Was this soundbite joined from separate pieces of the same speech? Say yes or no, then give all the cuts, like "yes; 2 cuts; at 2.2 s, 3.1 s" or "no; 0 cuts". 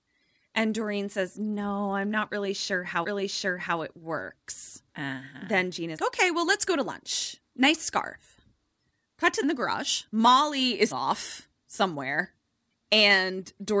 yes; 6 cuts; at 3.0 s, 4.9 s, 6.0 s, 9.4 s, 10.1 s, 10.9 s